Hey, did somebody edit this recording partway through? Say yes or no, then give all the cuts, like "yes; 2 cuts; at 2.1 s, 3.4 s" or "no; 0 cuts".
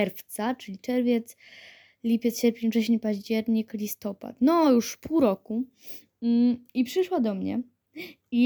no; 0 cuts